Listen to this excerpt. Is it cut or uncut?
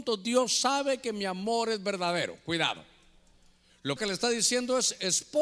cut